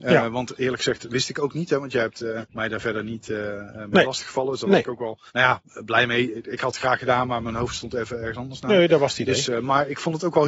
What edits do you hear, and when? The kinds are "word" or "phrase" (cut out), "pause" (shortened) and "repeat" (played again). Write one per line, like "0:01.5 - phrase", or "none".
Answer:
0:02.5 - pause
0:05.3 - pause